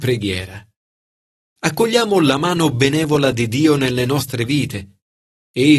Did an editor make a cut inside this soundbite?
no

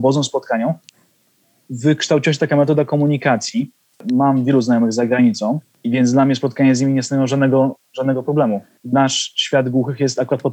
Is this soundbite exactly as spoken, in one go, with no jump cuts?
yes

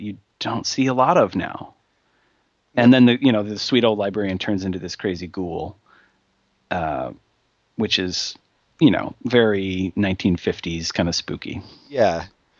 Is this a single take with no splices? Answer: yes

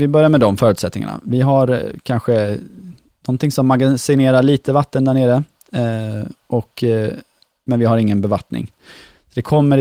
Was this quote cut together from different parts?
no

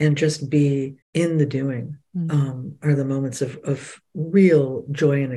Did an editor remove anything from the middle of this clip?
yes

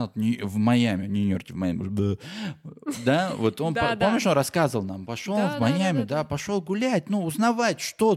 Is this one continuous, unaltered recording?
yes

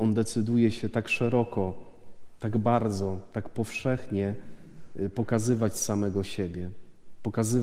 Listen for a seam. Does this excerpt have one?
no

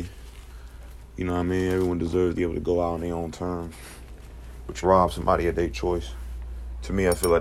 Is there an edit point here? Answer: yes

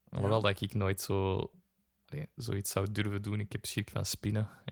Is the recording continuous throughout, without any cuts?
yes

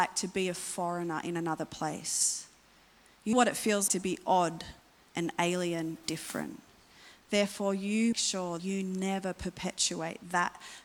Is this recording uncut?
no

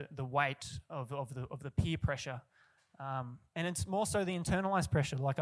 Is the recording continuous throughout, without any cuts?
yes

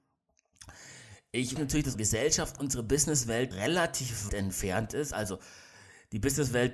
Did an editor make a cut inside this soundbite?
yes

